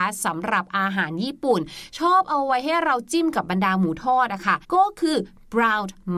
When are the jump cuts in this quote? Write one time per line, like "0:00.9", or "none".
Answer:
0:04.6